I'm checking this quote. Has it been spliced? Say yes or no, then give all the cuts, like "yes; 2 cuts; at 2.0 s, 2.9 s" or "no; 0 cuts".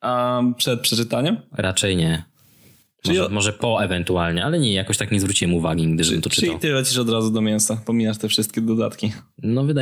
no; 0 cuts